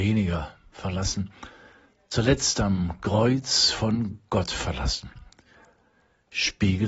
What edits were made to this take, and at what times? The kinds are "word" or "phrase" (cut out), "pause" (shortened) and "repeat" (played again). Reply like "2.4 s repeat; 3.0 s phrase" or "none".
none